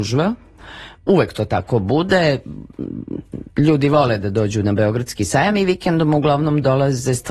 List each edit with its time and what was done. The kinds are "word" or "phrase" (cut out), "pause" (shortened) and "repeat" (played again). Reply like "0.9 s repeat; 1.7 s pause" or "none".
3.5 s pause